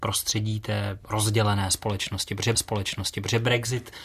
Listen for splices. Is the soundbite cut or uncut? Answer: cut